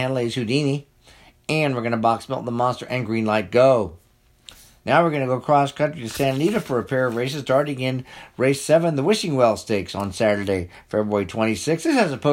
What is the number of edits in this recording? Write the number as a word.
zero